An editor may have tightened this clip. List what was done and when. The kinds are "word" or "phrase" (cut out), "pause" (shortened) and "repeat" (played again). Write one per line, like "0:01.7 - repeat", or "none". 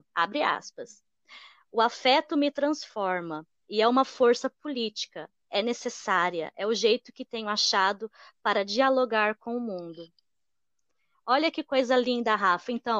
none